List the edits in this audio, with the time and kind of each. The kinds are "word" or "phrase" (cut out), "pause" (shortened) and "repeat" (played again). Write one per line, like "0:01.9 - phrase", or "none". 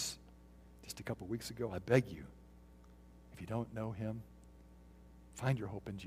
none

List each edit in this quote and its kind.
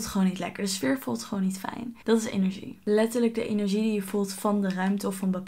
0:02.0 - pause

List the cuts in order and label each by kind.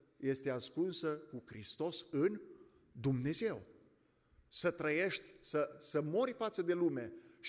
none

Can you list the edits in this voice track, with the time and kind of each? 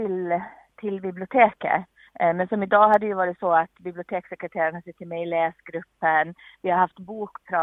0:02.1 - pause

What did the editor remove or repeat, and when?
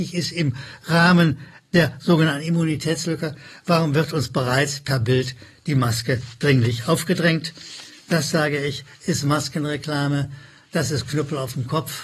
none

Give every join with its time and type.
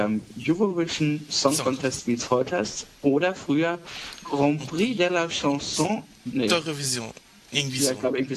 none

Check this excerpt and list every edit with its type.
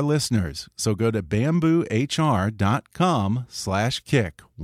none

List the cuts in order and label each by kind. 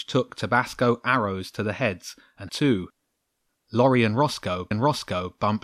0:02.5 - word
0:04.7 - repeat

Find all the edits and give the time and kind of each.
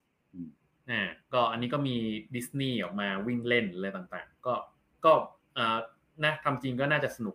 0:01.2 - pause

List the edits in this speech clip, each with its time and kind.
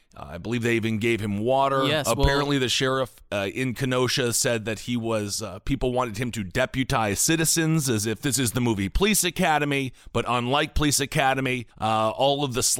0:11.7 - pause

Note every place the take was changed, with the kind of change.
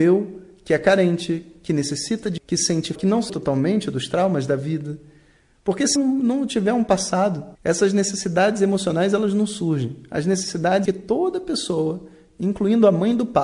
0:02.4 - word
0:03.0 - word
0:03.3 - word
0:06.0 - word
0:07.5 - pause
0:10.9 - phrase

